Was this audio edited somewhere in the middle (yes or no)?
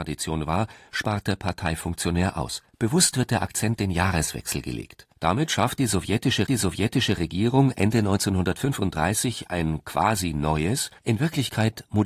yes